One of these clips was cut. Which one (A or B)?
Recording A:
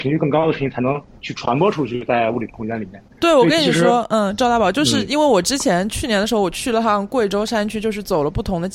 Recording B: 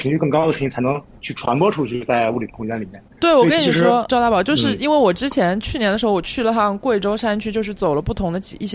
B